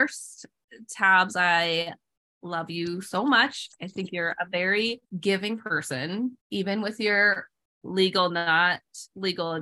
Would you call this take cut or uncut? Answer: uncut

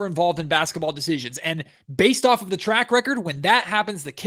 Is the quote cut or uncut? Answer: uncut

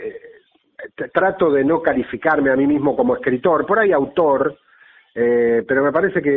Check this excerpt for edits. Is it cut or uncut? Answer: uncut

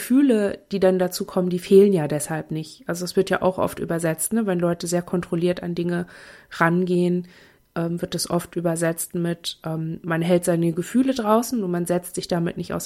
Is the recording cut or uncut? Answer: uncut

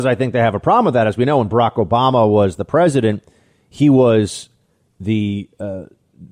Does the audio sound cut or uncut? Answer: uncut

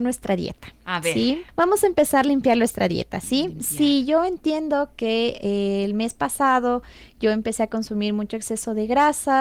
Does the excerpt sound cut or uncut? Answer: uncut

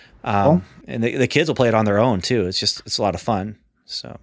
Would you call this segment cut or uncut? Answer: uncut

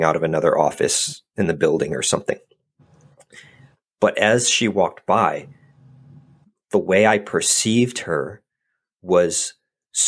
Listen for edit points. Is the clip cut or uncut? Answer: uncut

